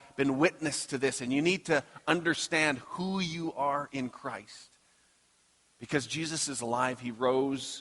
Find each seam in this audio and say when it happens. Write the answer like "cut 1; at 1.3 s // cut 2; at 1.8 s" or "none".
none

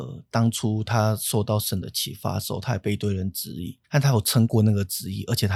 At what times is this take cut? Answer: cut 1; at 3.8 s

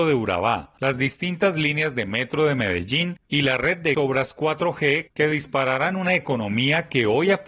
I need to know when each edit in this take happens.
cut 1; at 3.9 s

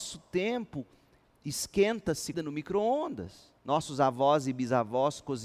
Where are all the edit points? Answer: cut 1; at 2.3 s // cut 2; at 3.6 s

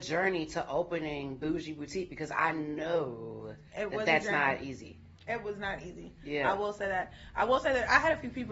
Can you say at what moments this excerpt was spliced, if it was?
cut 1; at 3.7 s

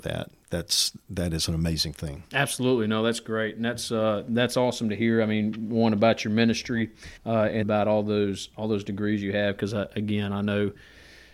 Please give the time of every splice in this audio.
cut 1; at 7.2 s // cut 2; at 7.6 s

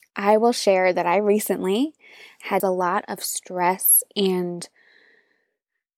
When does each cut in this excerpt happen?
none

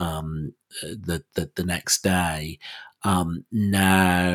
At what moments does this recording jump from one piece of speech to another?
cut 1; at 1.6 s

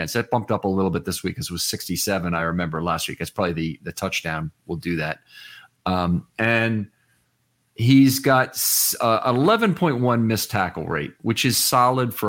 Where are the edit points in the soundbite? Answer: none

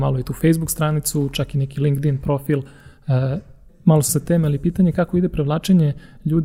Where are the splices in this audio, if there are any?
cut 1; at 3.7 s // cut 2; at 4.1 s

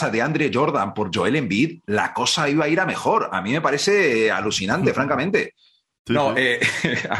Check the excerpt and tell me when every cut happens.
none

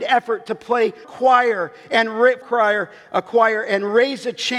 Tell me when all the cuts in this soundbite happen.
cut 1; at 1.0 s // cut 2; at 2.4 s

